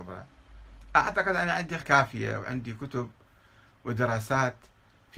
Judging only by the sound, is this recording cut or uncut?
cut